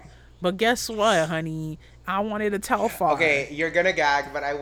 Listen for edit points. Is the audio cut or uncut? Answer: uncut